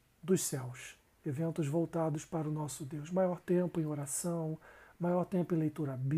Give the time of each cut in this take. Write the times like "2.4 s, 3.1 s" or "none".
none

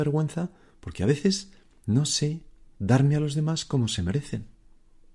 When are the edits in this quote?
none

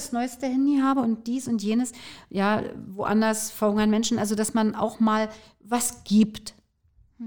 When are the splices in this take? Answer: none

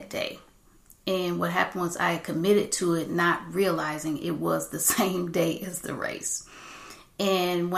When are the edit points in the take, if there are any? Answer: none

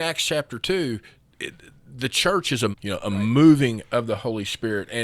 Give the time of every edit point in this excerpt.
2.7 s

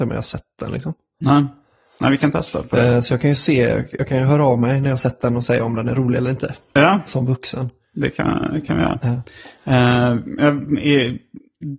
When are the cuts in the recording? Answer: none

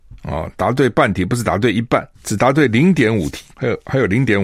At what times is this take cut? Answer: 2.1 s, 3.5 s

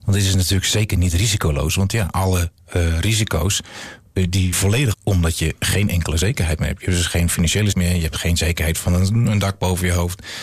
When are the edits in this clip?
4.5 s, 4.9 s, 7.7 s

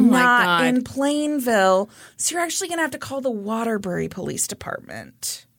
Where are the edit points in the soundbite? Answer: none

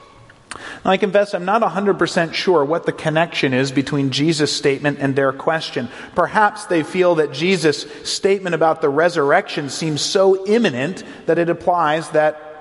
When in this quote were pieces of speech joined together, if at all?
none

